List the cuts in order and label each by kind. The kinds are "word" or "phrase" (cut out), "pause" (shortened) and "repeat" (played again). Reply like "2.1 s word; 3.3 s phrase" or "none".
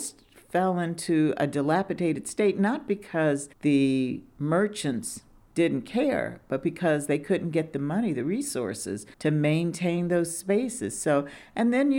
3.5 s pause; 5.4 s pause; 9.1 s pause